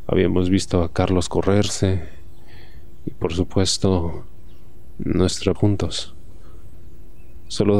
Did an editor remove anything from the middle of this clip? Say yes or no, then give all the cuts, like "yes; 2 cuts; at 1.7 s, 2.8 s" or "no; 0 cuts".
yes; 1 cut; at 5.6 s